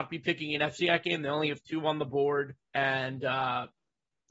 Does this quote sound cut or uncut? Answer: cut